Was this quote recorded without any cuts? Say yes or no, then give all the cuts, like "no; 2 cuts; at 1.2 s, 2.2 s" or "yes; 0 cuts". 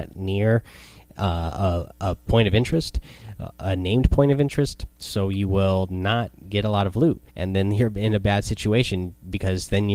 no; 3 cuts; at 3.5 s, 4.9 s, 7.3 s